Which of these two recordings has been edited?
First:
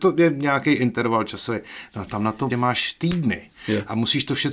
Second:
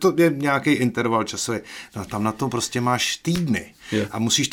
first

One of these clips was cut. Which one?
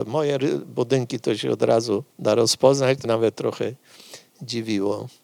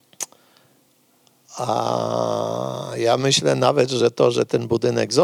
first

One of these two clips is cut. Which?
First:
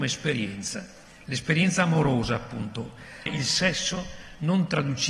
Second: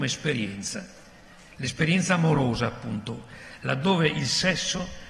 first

